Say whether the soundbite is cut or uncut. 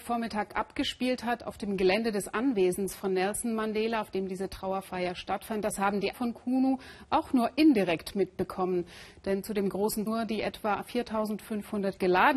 cut